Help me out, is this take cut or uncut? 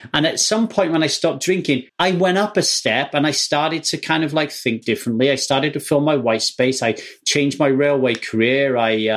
cut